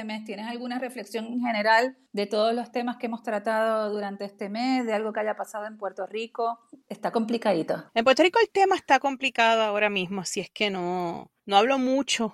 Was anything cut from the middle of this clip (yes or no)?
yes